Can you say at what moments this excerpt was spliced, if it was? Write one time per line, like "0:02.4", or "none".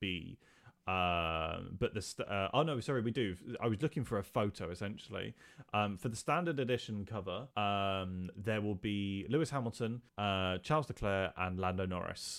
0:07.5
0:10.1